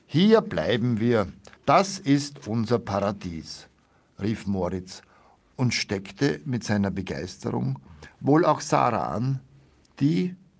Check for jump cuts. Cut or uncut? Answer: cut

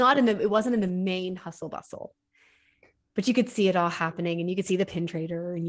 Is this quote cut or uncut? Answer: uncut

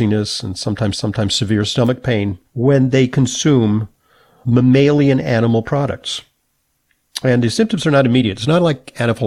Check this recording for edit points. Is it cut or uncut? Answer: cut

